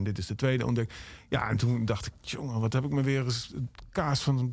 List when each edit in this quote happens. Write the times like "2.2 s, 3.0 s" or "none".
none